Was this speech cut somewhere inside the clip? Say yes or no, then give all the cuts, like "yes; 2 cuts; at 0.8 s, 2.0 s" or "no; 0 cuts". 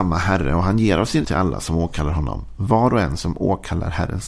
yes; 1 cut; at 1.2 s